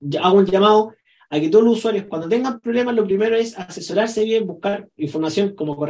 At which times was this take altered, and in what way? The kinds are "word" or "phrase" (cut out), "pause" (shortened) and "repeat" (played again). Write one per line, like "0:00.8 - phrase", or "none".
none